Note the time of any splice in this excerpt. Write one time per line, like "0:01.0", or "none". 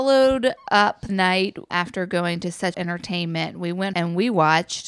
0:01.1
0:01.7
0:02.7
0:03.9